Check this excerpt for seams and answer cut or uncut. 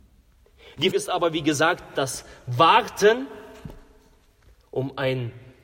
cut